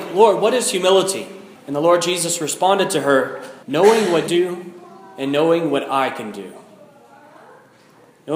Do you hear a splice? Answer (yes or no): yes